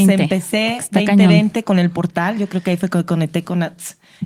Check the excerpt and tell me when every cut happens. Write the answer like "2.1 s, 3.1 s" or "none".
none